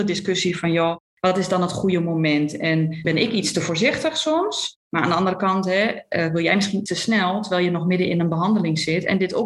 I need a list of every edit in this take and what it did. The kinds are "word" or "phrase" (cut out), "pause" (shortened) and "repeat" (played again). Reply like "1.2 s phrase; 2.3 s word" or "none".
3.0 s word; 6.9 s word